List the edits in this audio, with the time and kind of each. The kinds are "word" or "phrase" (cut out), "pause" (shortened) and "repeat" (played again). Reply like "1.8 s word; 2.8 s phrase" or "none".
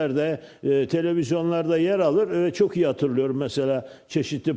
none